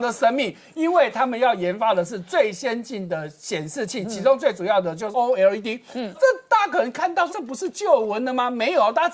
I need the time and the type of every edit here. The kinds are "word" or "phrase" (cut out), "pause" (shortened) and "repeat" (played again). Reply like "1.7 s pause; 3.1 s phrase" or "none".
5.1 s word; 6.1 s word; 7.3 s word